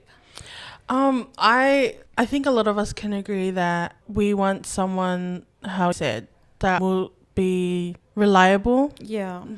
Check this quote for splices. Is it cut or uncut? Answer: cut